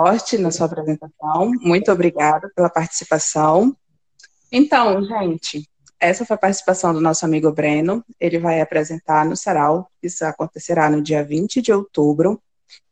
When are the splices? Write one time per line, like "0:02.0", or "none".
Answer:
none